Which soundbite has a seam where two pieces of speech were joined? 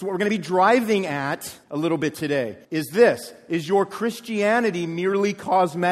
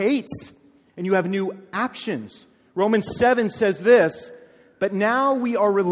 first; 2 cuts; at 1.6 s, 2.6 s

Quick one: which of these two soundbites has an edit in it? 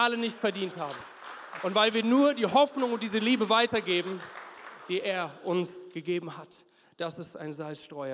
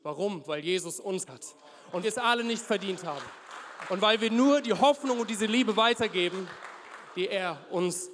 second; 2 cuts; at 1.3 s, 2.0 s

